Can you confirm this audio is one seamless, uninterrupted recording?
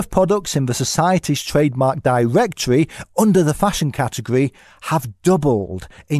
yes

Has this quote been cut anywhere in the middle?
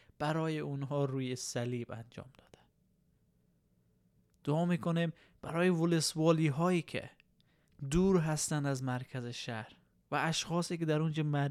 no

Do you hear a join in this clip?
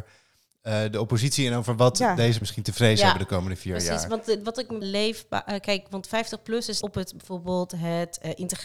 yes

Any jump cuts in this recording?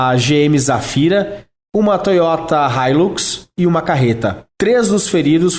no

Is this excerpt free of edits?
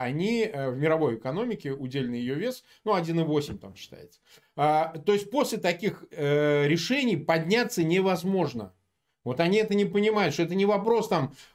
yes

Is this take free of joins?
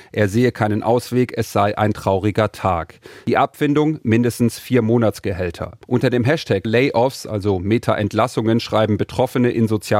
no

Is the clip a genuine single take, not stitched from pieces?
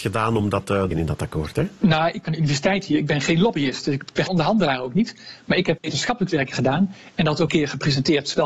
no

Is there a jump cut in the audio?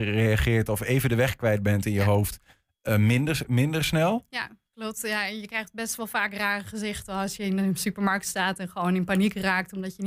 no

